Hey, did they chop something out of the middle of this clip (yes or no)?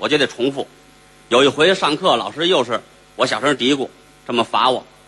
no